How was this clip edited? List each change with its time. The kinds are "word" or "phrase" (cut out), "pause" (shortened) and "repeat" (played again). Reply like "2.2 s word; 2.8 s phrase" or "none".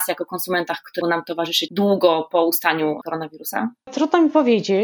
1.0 s word; 1.7 s word; 3.0 s word